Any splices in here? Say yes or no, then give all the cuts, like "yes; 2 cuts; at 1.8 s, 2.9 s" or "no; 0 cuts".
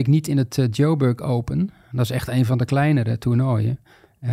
no; 0 cuts